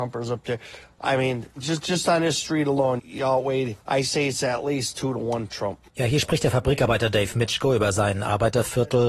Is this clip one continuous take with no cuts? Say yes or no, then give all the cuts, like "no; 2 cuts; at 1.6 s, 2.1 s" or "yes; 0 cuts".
no; 4 cuts; at 1.5 s, 3.0 s, 3.8 s, 5.9 s